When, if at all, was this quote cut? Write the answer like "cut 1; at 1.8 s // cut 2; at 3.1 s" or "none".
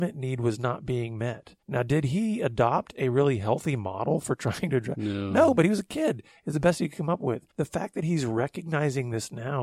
cut 1; at 1.6 s // cut 2; at 7.5 s